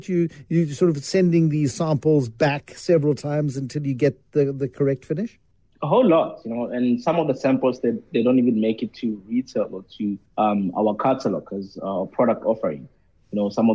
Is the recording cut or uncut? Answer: cut